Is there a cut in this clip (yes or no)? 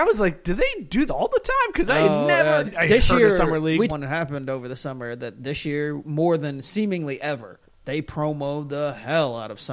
yes